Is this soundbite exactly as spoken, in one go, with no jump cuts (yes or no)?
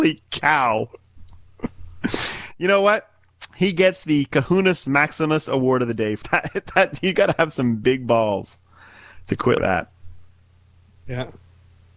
no